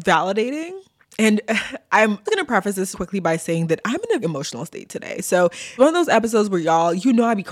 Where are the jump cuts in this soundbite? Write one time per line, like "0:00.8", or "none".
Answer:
0:02.3
0:02.9
0:04.2
0:05.8